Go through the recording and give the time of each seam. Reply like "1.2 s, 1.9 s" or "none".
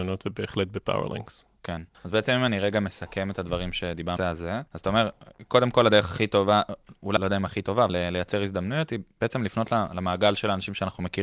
1.9 s, 4.2 s, 4.7 s, 7.2 s, 7.9 s